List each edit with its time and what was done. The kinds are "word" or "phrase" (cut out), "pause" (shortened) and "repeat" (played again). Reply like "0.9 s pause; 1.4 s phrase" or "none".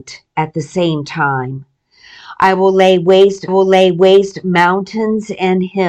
3.5 s repeat